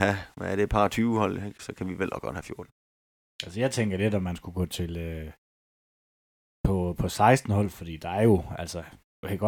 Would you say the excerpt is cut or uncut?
uncut